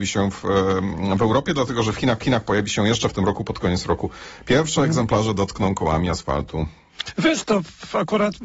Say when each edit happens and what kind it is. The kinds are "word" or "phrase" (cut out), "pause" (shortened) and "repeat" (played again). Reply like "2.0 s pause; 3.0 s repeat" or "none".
2.2 s repeat